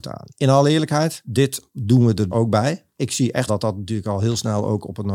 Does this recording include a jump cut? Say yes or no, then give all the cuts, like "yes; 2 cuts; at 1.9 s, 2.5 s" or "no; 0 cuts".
yes; 3 cuts; at 1.7 s, 2.3 s, 3.5 s